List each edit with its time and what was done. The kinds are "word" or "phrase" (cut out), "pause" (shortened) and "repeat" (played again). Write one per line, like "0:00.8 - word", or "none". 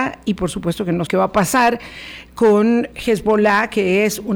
0:01.1 - word
0:02.9 - word